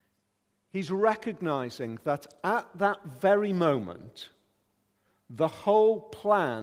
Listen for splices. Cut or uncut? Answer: uncut